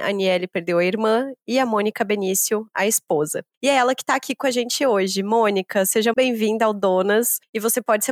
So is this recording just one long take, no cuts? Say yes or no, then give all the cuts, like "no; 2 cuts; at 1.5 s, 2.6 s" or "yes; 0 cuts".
no; 1 cut; at 6.1 s